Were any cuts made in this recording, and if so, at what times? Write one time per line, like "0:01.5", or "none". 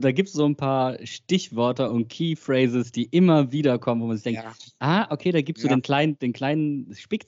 none